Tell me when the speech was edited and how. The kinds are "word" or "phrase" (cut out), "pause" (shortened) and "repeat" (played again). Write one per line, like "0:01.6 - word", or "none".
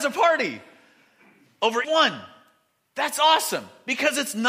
0:01.8 - word